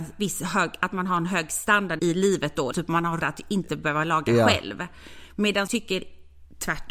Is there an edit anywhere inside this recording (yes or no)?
yes